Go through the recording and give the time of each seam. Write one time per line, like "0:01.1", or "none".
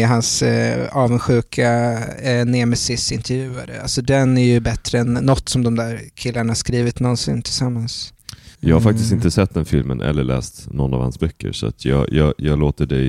0:08.5